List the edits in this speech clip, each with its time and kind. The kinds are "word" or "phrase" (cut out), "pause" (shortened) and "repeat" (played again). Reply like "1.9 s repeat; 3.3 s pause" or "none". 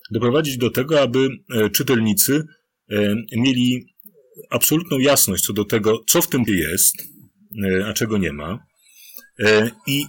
6.5 s word